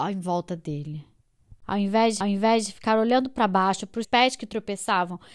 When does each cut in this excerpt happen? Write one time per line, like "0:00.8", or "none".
0:01.6
0:02.2
0:04.0